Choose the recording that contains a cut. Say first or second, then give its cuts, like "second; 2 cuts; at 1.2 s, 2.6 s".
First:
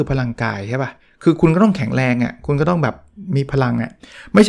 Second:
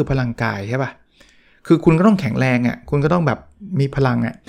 first; 1 cut; at 1.0 s